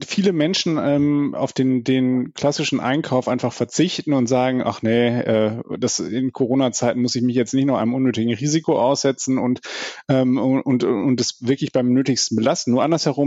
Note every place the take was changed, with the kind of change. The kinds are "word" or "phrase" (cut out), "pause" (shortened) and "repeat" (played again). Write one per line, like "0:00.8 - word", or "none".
none